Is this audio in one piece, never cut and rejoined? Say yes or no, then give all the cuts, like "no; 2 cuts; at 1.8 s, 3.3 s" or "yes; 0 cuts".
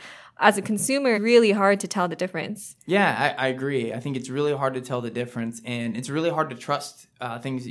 no; 1 cut; at 1.1 s